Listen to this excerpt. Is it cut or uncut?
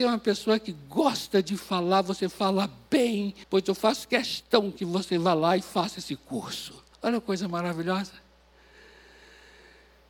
cut